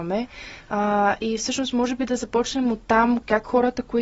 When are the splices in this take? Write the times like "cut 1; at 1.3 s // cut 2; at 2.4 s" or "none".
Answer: none